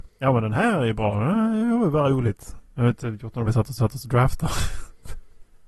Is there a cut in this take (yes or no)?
yes